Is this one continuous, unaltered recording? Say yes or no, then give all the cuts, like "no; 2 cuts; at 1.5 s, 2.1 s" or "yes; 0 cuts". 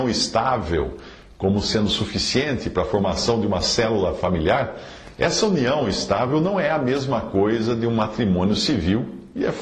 yes; 0 cuts